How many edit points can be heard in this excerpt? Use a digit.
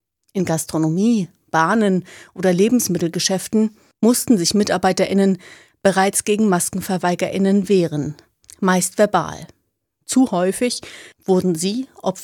0